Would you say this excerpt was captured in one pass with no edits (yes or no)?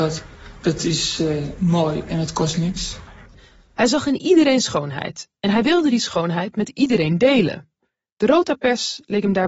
yes